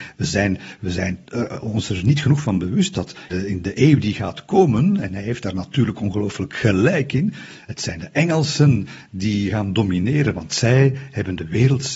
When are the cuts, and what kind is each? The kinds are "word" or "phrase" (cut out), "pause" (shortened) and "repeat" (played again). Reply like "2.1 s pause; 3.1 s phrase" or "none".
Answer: 3.3 s word